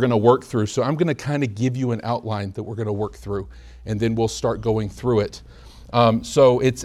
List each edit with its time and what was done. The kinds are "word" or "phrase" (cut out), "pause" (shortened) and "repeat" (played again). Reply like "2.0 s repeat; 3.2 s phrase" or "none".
none